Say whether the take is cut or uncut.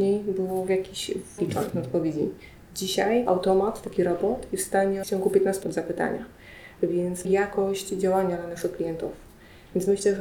cut